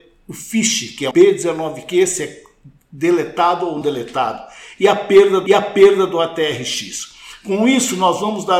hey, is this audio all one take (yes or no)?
no